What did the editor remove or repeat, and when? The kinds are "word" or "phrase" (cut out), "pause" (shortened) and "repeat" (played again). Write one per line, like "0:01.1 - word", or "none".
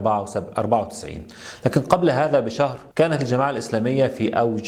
0:02.9 - pause